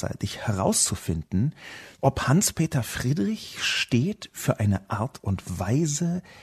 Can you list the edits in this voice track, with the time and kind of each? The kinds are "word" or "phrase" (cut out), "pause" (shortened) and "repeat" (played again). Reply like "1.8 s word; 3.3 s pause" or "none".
1.9 s pause